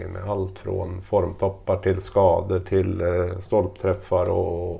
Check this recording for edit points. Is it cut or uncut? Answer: uncut